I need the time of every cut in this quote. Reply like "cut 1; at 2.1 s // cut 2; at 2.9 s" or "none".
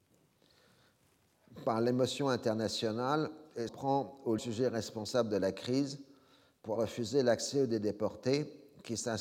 cut 1; at 3.7 s // cut 2; at 4.4 s // cut 3; at 6.7 s

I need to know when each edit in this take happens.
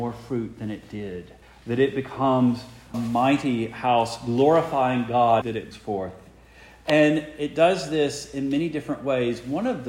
cut 1; at 1.4 s // cut 2; at 2.9 s // cut 3; at 5.4 s // cut 4; at 5.7 s

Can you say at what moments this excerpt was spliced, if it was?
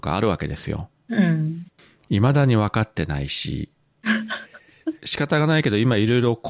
cut 1; at 5.0 s

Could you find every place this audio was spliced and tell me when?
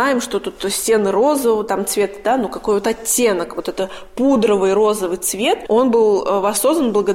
none

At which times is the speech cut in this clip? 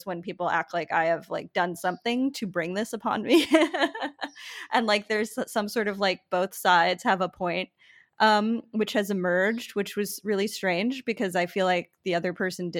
none

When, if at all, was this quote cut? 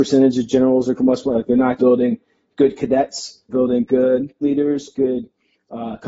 cut 1; at 1.0 s // cut 2; at 1.8 s // cut 3; at 3.5 s // cut 4; at 4.4 s // cut 5; at 4.9 s

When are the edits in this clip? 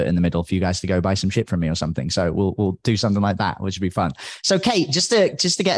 none

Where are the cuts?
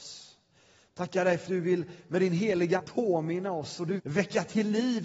cut 1; at 1.5 s // cut 2; at 2.8 s // cut 3; at 4.0 s

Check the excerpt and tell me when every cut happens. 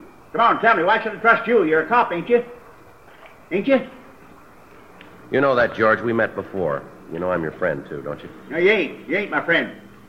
none

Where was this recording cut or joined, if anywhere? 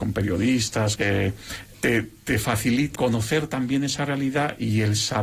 cut 1; at 1.0 s // cut 2; at 1.7 s // cut 3; at 3.0 s

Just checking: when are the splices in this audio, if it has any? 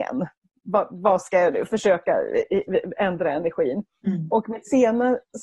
cut 1; at 1.7 s

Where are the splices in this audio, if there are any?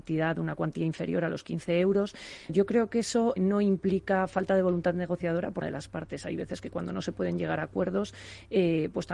cut 1; at 2.5 s // cut 2; at 3.4 s // cut 3; at 5.6 s

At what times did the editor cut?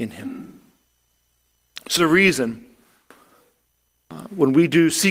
cut 1; at 2.0 s

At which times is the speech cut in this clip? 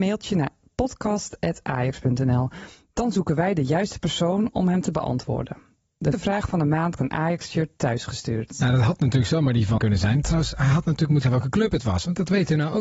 cut 1; at 6.1 s // cut 2; at 7.0 s // cut 3; at 9.8 s // cut 4; at 11.2 s

